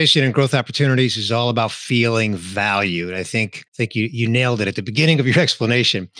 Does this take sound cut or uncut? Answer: cut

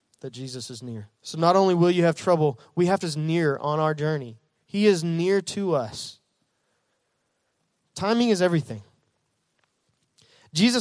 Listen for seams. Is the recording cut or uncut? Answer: cut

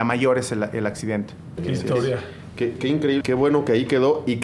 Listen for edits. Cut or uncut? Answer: cut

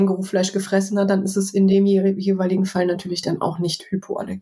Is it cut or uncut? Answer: uncut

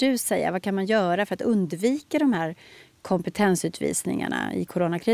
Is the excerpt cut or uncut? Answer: uncut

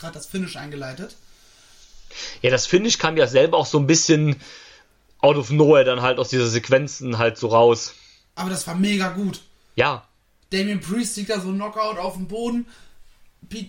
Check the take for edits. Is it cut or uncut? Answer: uncut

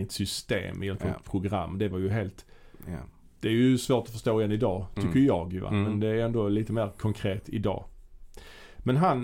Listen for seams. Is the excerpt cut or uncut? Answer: uncut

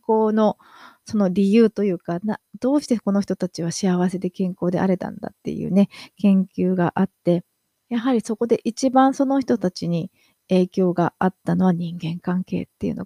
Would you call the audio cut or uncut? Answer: uncut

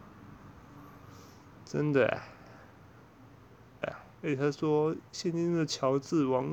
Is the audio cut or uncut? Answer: cut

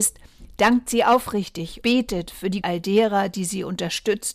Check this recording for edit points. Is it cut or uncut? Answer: cut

